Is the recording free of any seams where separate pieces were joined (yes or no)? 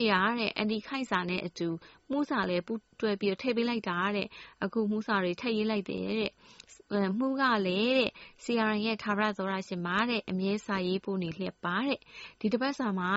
yes